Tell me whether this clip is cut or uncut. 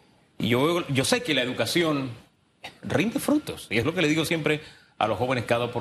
uncut